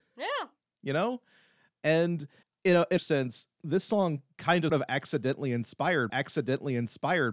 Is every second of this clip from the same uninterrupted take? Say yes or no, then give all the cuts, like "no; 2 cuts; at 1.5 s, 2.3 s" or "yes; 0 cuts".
no; 4 cuts; at 2.4 s, 3.0 s, 4.7 s, 6.1 s